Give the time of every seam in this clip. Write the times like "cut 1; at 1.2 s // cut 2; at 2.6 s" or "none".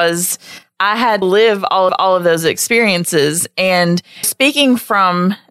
cut 1; at 1.2 s // cut 2; at 1.9 s // cut 3; at 4.2 s